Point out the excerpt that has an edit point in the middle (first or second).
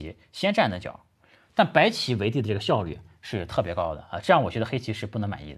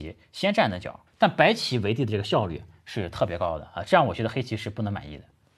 second